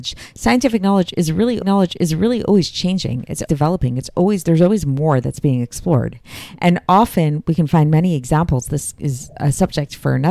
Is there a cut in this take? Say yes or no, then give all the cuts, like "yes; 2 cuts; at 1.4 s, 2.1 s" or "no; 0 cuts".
yes; 2 cuts; at 1.6 s, 3.5 s